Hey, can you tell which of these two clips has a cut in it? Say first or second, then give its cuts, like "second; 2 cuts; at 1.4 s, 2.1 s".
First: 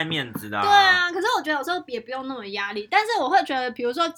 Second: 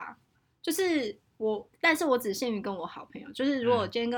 second; 1 cut; at 1.7 s